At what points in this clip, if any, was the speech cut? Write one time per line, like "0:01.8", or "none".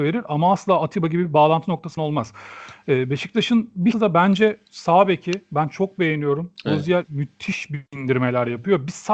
0:02.0
0:03.9
0:04.7